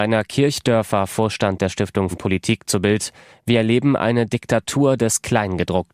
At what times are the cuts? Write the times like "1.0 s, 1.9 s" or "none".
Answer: 2.1 s